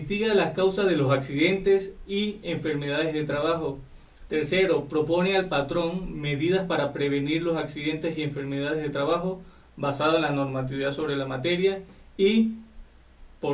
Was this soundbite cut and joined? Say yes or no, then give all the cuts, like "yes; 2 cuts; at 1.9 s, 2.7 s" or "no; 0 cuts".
no; 0 cuts